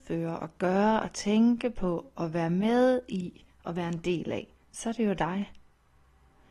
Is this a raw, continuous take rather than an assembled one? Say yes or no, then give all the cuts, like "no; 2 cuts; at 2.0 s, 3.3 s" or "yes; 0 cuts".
no; 1 cut; at 4.6 s